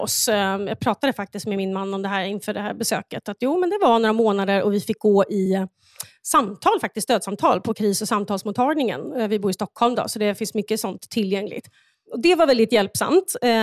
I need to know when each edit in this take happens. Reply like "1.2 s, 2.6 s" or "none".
none